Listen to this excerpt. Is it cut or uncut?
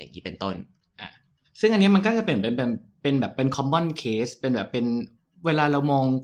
uncut